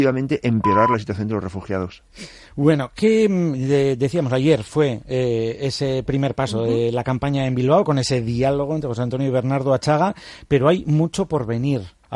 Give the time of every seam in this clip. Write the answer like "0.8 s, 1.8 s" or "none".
none